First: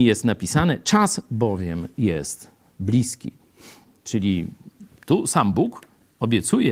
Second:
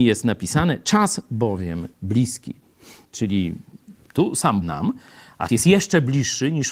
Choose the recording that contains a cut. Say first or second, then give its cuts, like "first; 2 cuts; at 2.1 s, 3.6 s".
second; 4 cuts; at 1.9 s, 3.0 s, 4.6 s, 5.5 s